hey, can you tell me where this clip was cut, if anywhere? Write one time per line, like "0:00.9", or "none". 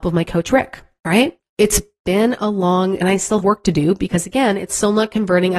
0:03.0
0:03.4